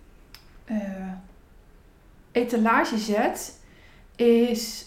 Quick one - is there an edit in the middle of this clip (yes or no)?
no